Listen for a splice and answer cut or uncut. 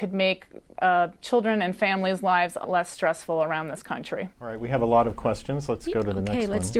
cut